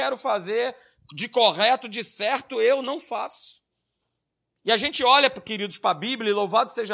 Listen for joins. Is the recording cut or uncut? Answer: uncut